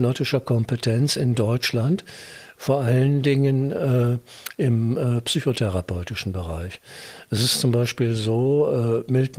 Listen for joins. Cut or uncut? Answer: uncut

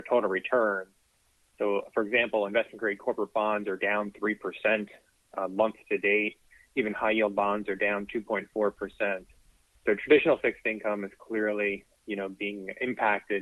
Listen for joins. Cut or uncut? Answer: uncut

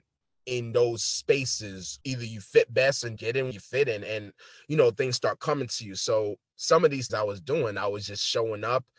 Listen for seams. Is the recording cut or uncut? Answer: cut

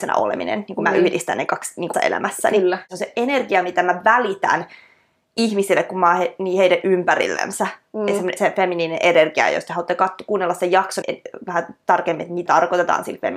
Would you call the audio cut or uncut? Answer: cut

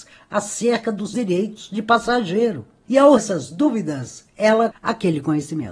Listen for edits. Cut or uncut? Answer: cut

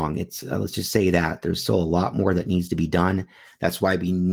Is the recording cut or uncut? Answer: uncut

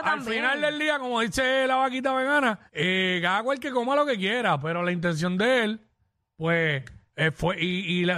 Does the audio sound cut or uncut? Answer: cut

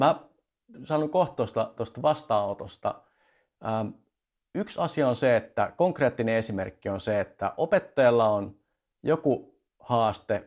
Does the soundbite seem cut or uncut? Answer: uncut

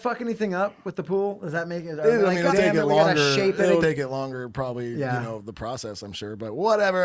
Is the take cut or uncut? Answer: cut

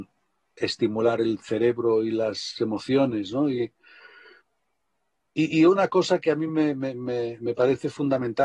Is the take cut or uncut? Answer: uncut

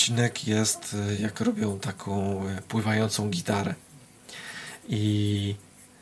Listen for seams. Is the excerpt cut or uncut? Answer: uncut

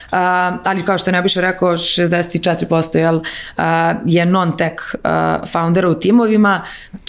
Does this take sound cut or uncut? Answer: uncut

